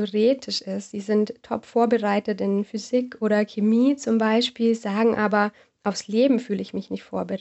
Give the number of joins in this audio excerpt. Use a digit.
0